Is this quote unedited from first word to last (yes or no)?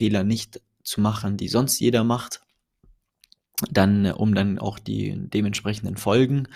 yes